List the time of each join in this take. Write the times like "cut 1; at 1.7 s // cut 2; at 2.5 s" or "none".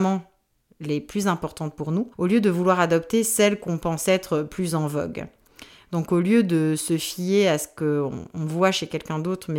cut 1; at 2.1 s

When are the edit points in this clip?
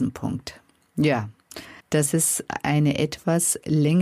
cut 1; at 1.8 s

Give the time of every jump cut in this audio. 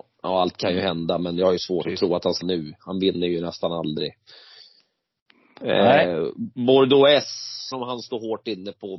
cut 1; at 1.8 s // cut 2; at 2.4 s // cut 3; at 7.7 s

